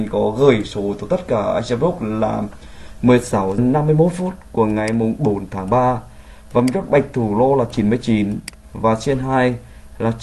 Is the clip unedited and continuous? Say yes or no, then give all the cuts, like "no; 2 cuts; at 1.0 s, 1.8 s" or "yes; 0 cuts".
no; 1 cut; at 3.6 s